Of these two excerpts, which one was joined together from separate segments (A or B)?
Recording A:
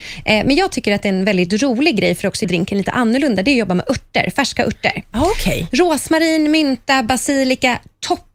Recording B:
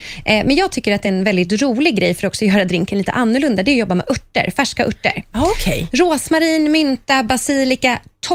A